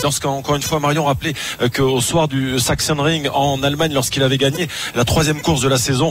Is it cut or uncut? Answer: uncut